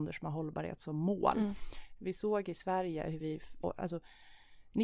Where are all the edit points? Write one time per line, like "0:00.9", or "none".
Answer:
0:03.2
0:03.6